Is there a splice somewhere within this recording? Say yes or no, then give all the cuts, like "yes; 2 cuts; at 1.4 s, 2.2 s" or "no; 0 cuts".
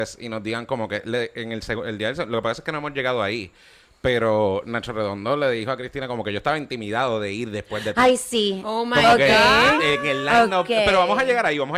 no; 0 cuts